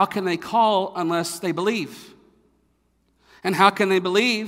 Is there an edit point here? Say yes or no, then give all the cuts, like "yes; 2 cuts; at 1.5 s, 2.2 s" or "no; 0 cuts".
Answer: no; 0 cuts